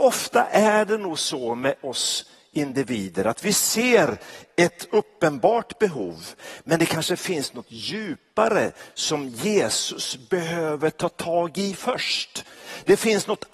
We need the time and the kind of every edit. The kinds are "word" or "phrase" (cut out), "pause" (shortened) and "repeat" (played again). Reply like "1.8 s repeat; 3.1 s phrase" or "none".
none